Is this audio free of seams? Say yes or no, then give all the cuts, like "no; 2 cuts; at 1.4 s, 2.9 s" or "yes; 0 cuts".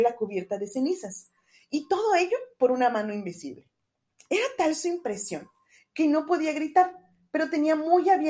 yes; 0 cuts